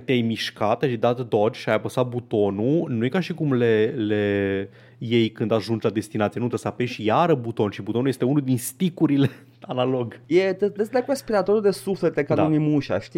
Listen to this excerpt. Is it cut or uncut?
uncut